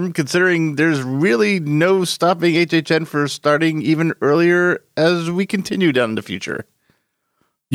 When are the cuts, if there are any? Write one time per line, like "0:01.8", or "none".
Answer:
none